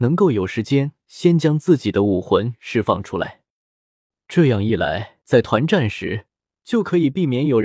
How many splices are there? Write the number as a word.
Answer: one